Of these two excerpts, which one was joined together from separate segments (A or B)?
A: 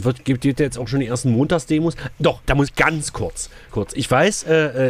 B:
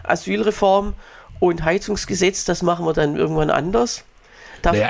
A